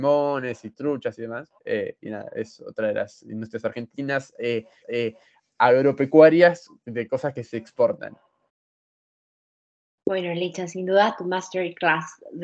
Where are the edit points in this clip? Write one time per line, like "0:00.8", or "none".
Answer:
0:01.6
0:04.8